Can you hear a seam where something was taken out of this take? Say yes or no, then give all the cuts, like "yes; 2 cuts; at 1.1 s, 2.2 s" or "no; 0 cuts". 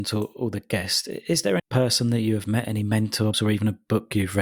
yes; 2 cuts; at 1.6 s, 3.3 s